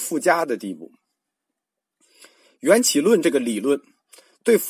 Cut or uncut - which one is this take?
uncut